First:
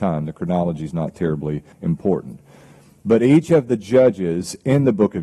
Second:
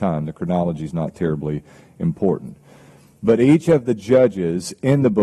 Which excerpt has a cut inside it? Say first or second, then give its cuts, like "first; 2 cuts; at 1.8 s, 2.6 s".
first; 1 cut; at 1.7 s